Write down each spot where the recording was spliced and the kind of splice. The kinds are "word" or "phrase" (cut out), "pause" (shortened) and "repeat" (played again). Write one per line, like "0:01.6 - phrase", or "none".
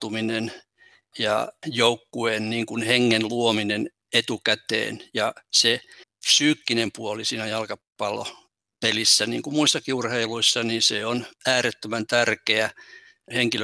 0:06.0 - pause